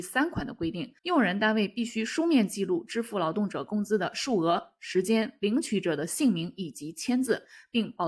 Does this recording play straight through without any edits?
no; 1 cut; at 1.0 s

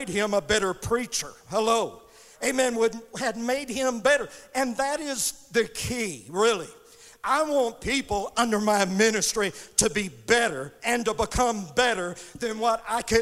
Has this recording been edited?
no; 0 cuts

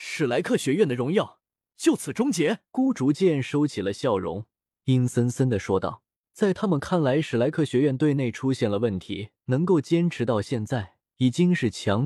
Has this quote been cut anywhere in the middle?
yes; 5 cuts; at 2.7 s, 4.7 s, 6.2 s, 9.4 s, 11.1 s

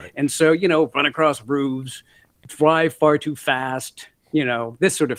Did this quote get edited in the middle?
no; 0 cuts

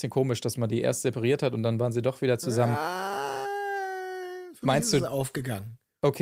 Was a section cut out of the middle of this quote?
no; 0 cuts

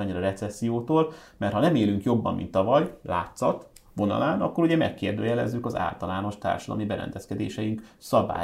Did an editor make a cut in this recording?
no; 0 cuts

